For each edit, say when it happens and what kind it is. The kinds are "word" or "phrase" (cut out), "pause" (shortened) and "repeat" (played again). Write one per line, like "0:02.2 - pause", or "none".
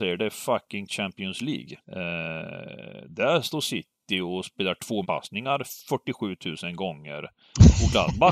0:01.8 - pause
0:05.0 - word

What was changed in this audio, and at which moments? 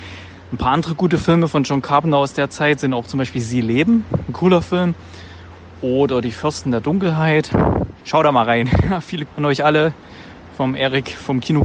0:08.0 - pause
0:09.3 - phrase

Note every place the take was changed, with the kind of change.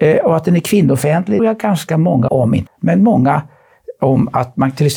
0:01.4 - phrase
0:02.3 - phrase
0:02.7 - word

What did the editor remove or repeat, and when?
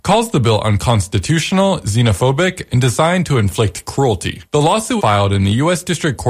0:04.5 - pause
0:05.0 - word

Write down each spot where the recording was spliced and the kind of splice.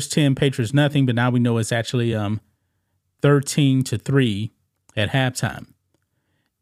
none

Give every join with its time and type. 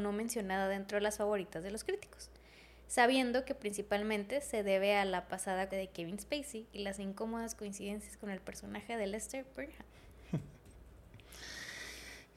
0:05.7 - word

